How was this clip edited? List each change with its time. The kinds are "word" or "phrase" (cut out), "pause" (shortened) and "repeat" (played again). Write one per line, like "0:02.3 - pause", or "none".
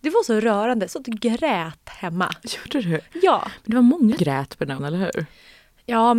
0:00.9 - word
0:04.2 - word
0:04.8 - word